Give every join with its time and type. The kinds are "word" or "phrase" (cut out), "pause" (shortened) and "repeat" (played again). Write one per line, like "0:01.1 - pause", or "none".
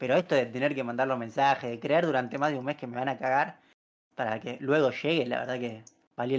none